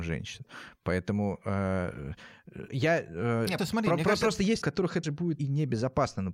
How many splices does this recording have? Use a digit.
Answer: 5